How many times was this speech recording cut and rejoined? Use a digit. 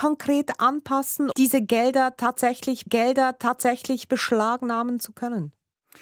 2